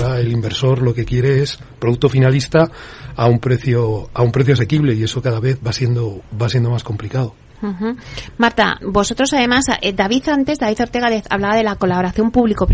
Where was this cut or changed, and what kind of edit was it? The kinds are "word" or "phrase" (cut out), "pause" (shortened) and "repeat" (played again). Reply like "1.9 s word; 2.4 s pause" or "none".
8.8 s word